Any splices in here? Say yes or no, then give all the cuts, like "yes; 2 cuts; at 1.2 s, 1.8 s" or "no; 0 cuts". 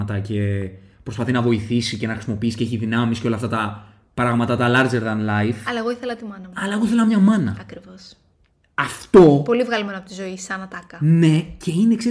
no; 0 cuts